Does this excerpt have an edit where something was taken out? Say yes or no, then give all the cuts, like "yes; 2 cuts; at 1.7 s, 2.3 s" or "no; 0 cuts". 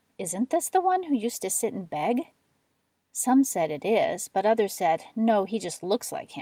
no; 0 cuts